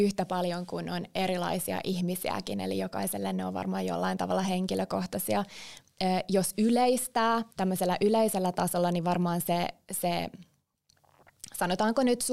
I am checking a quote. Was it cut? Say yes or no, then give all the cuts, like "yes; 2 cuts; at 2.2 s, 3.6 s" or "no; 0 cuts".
yes; 1 cut; at 7.5 s